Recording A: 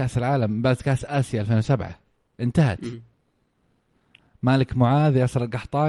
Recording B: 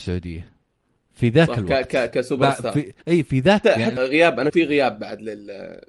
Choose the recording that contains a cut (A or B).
B